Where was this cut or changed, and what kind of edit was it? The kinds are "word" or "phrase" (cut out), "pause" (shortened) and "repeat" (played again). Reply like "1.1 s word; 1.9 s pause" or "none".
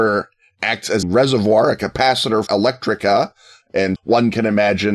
1.0 s word; 2.5 s word; 4.0 s word